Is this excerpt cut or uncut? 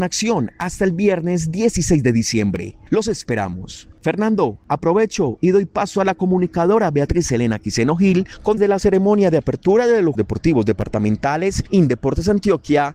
cut